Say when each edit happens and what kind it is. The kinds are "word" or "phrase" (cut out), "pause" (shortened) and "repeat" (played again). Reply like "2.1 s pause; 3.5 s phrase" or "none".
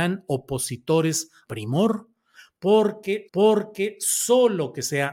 1.4 s word; 3.3 s repeat